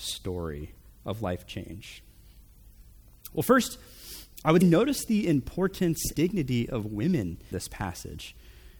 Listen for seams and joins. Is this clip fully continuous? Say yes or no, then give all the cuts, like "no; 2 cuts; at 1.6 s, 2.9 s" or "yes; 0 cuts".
no; 3 cuts; at 4.6 s, 6.1 s, 7.5 s